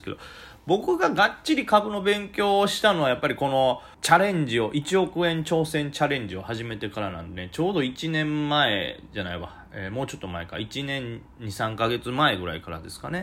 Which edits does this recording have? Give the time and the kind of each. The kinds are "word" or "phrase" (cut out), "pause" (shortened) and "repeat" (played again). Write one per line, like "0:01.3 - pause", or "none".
0:03.9 - pause